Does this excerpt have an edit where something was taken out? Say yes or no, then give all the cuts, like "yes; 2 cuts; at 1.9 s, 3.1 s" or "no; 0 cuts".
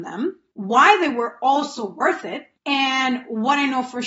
no; 0 cuts